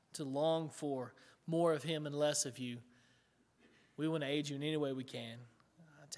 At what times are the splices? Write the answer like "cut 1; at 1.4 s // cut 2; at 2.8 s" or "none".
none